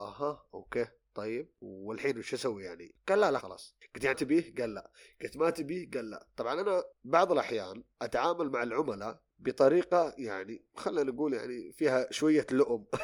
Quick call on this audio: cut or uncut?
cut